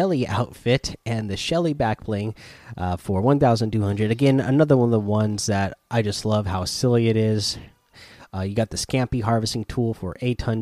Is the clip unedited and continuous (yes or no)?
yes